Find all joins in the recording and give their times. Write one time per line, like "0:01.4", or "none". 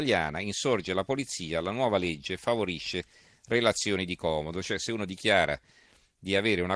none

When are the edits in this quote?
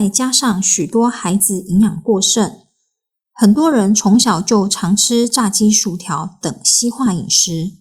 none

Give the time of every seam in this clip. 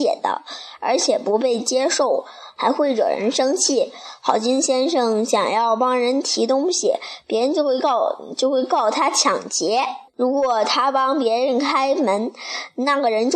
0:10.1

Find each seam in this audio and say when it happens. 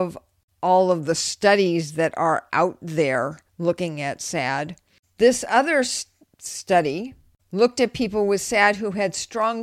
0:03.5

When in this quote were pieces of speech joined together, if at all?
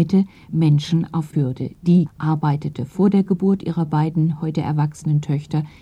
0:01.3
0:02.1

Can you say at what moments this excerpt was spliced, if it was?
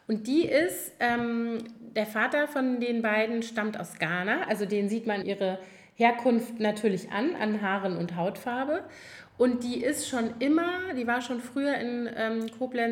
0:05.2

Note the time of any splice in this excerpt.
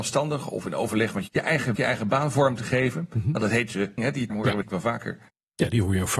0:01.3
0:01.8
0:04.0
0:04.3
0:04.6

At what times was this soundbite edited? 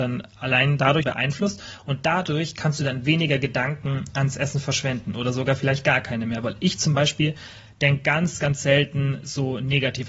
0:01.0

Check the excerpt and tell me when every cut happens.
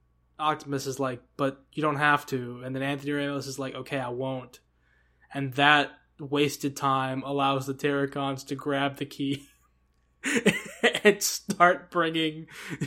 none

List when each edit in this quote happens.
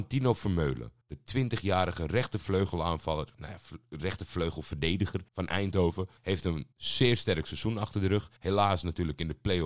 0:01.0
0:05.3
0:06.2
0:06.7
0:08.4

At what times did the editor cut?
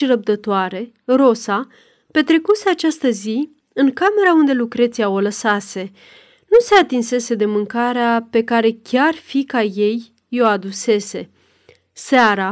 none

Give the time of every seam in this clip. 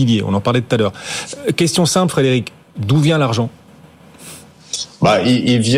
none

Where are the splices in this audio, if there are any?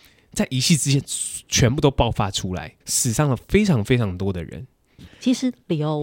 0:02.8

